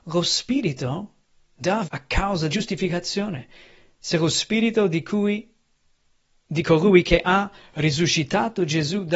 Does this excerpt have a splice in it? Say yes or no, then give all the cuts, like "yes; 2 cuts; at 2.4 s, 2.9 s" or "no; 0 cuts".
yes; 2 cuts; at 1.8 s, 2.5 s